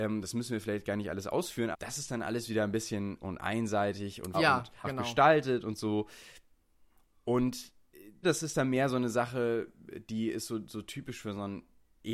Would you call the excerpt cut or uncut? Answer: cut